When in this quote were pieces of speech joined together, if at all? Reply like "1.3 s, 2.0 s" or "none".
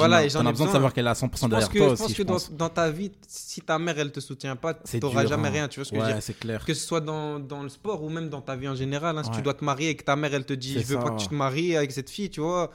none